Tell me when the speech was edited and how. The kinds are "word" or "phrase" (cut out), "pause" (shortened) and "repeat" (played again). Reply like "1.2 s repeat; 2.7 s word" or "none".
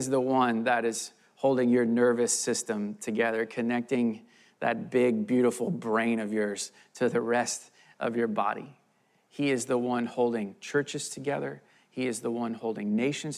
none